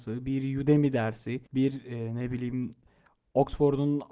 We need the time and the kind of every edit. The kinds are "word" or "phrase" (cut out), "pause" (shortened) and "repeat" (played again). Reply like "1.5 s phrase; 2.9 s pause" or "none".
1.5 s pause

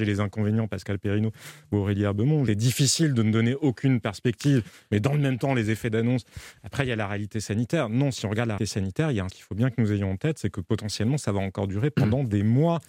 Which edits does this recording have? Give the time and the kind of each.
2.5 s phrase; 8.6 s word; 9.3 s word

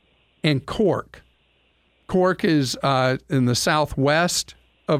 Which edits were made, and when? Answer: none

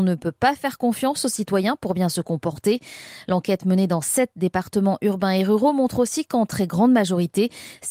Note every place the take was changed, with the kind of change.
none

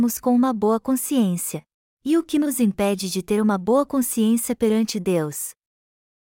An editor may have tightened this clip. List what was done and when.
1.9 s pause

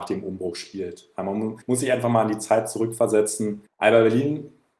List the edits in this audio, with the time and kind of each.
1.6 s pause; 3.7 s pause

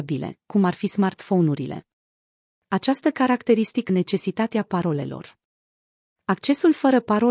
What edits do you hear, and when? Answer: 3.9 s word

